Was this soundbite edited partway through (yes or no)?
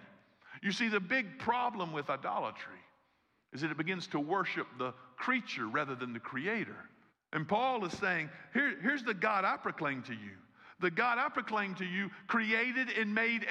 yes